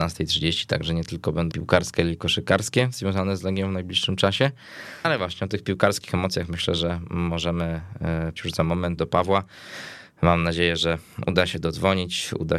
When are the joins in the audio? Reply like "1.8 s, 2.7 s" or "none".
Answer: 1.5 s, 5.0 s, 8.4 s, 9.0 s